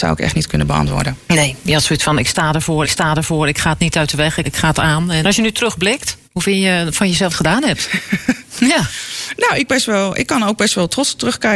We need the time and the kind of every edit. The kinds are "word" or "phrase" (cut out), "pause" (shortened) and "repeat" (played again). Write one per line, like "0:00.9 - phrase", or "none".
0:02.8 - repeat
0:04.4 - word
0:05.2 - word
0:06.2 - pause
0:07.3 - phrase
0:09.7 - phrase